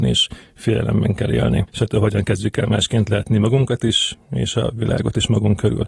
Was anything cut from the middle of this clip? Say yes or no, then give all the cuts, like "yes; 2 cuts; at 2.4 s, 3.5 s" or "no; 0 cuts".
no; 0 cuts